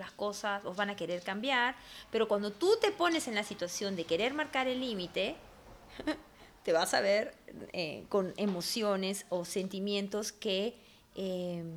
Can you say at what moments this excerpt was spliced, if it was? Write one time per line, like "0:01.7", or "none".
none